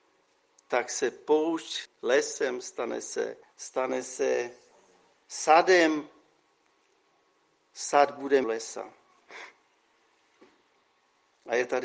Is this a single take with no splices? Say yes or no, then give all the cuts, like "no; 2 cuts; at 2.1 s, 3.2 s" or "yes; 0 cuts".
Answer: no; 3 cuts; at 1.9 s, 3.4 s, 8.4 s